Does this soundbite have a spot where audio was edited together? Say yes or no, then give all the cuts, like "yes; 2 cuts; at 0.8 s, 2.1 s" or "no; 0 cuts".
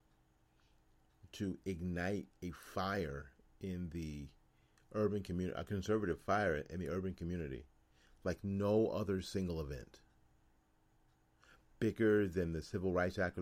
no; 0 cuts